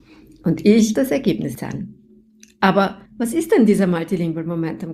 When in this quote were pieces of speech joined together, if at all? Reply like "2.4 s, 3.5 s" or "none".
0.9 s, 1.5 s, 3.1 s